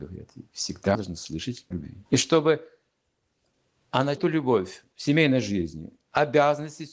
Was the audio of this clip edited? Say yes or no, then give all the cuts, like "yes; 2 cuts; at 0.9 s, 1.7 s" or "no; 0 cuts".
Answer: yes; 4 cuts; at 0.9 s, 1.7 s, 2.1 s, 4.2 s